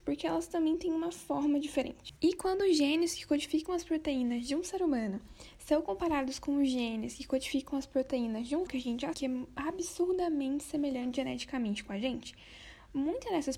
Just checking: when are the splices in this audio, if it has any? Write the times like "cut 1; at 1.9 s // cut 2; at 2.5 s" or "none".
cut 1; at 2.2 s // cut 2; at 8.7 s // cut 3; at 9.1 s